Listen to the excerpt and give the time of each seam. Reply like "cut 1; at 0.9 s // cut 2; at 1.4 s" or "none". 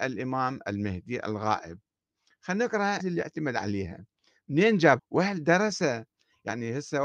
cut 1; at 3.0 s // cut 2; at 5.0 s